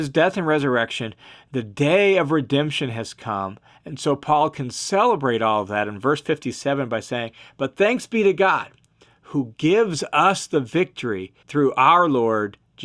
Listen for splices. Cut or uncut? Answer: cut